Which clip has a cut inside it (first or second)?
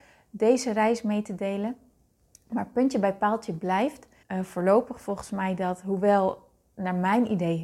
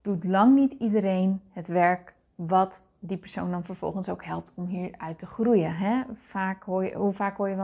first